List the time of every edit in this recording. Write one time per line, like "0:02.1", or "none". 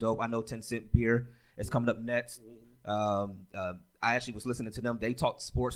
none